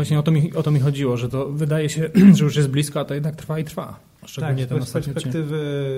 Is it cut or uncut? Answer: uncut